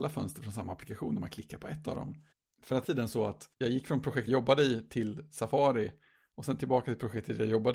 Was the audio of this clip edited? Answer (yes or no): yes